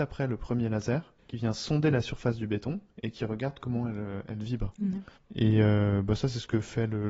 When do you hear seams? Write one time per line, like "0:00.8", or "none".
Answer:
0:01.2
0:05.2